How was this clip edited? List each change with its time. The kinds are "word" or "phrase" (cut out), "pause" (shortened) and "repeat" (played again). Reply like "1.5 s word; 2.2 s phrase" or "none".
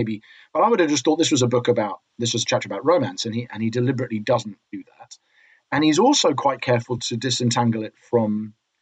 none